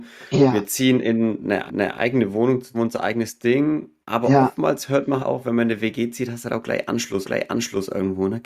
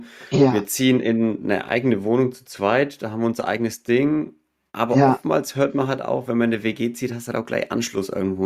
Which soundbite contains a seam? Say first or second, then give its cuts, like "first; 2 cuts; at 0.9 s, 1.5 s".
first; 5 cuts; at 1.7 s, 2.7 s, 4.0 s, 5.2 s, 7.2 s